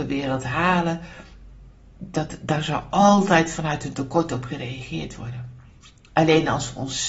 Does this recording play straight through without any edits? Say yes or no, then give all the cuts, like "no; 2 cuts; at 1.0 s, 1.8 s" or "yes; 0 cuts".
yes; 0 cuts